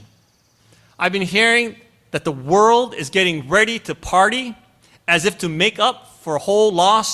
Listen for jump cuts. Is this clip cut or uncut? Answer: uncut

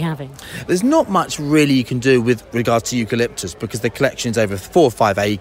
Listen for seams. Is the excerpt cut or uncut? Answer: uncut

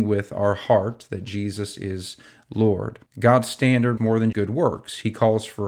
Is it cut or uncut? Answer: cut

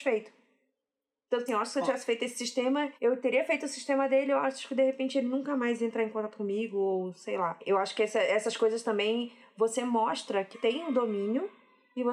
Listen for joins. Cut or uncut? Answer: cut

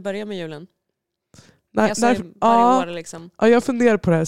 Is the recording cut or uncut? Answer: uncut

